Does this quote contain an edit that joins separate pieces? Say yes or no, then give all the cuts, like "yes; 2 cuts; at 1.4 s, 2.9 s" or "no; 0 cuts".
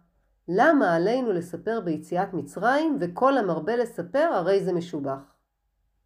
no; 0 cuts